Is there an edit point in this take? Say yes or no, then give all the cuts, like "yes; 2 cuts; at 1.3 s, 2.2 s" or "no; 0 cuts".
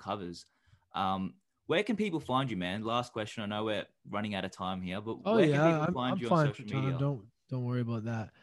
no; 0 cuts